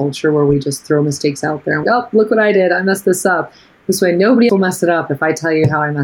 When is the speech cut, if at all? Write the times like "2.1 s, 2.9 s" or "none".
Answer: 1.8 s, 4.5 s